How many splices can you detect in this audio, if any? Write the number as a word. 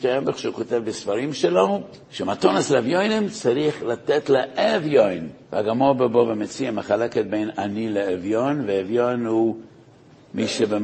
two